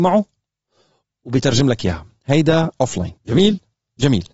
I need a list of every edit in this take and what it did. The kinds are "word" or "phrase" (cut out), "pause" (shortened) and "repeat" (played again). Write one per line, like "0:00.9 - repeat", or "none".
0:03.2 - pause